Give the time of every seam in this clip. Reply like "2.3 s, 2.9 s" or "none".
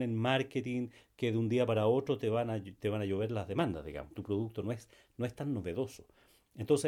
4.1 s